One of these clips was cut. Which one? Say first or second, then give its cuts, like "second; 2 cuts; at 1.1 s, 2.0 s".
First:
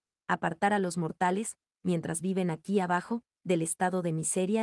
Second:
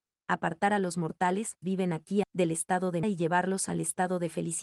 second; 3 cuts; at 1.6 s, 2.2 s, 3.0 s